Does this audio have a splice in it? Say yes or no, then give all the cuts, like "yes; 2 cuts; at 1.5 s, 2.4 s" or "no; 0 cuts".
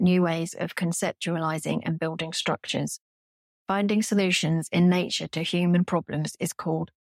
no; 0 cuts